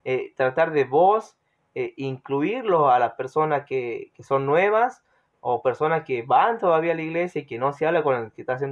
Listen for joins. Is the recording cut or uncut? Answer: uncut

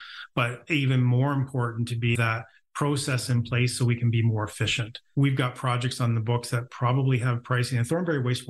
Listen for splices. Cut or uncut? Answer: cut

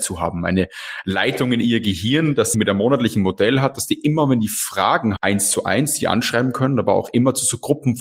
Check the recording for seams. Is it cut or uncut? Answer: cut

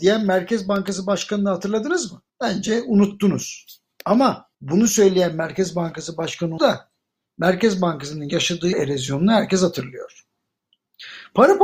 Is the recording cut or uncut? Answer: cut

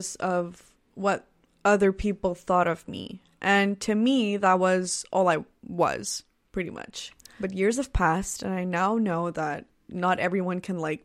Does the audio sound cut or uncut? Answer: uncut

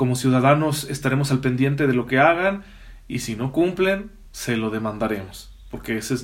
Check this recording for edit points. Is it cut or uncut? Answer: uncut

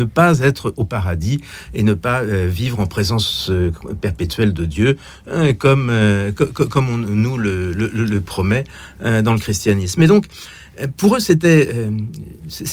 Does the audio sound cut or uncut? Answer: uncut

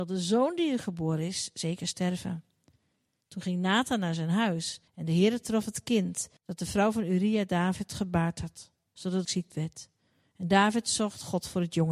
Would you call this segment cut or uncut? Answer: cut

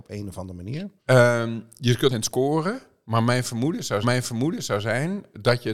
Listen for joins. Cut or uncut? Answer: cut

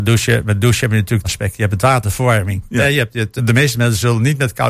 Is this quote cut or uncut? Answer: cut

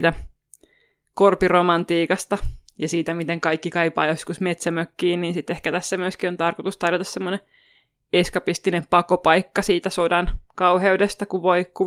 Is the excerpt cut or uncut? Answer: uncut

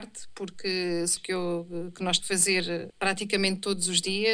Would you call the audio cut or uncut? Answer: cut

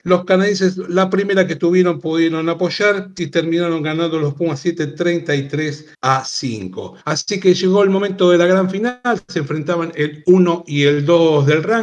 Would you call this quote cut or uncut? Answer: cut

